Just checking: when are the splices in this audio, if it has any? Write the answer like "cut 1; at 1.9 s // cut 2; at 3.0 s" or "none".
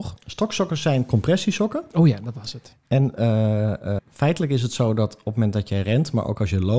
cut 1; at 4.0 s